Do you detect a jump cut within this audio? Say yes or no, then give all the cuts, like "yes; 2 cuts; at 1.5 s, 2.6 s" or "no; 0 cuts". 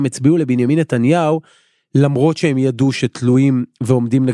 no; 0 cuts